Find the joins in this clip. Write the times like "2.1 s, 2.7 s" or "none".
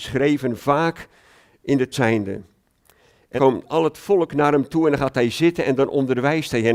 1.9 s, 3.4 s